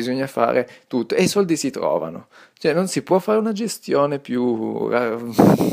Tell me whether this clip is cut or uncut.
uncut